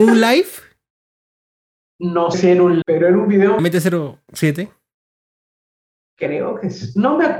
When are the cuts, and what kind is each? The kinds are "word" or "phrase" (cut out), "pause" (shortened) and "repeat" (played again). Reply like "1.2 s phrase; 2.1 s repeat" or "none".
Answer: 2.3 s word; 2.8 s word; 3.6 s phrase